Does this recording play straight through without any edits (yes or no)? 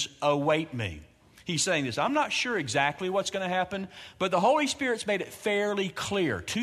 yes